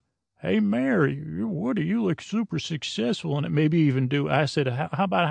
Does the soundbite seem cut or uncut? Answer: uncut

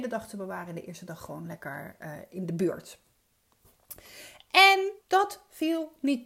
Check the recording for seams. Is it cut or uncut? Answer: cut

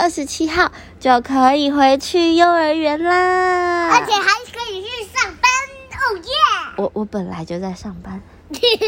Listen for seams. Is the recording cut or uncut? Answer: uncut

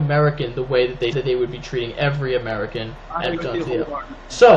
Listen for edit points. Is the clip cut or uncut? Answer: cut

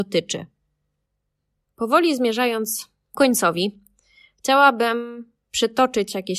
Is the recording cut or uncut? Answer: cut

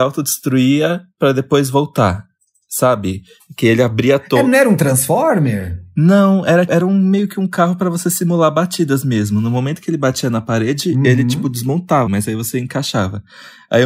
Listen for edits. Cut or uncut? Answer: cut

